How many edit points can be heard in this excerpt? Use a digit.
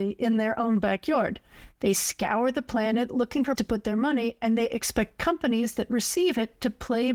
1